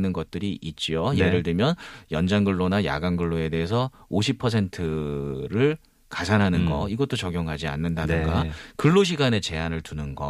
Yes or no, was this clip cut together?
no